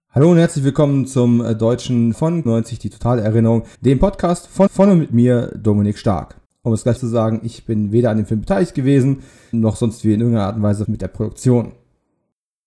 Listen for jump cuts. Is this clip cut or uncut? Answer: cut